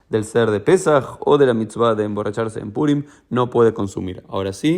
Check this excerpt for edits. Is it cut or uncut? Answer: uncut